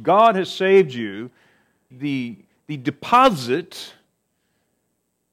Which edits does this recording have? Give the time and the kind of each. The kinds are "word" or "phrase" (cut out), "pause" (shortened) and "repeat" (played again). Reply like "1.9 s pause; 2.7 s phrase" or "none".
1.9 s word